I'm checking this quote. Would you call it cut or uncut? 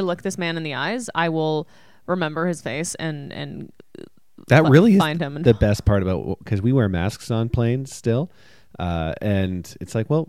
uncut